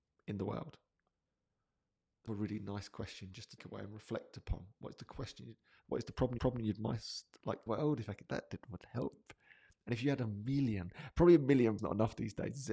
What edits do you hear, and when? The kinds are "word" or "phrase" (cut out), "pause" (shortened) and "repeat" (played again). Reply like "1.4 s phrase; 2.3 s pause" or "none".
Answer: 2.3 s word; 3.6 s word; 6.4 s repeat; 7.7 s phrase; 8.3 s word; 11.8 s word